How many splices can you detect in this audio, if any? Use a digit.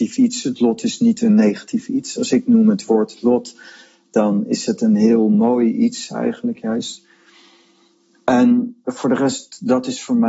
0